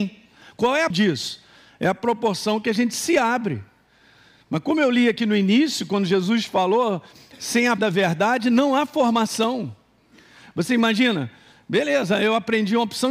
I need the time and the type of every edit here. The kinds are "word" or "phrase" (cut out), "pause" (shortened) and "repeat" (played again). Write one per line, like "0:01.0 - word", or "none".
0:00.9 - word
0:07.8 - word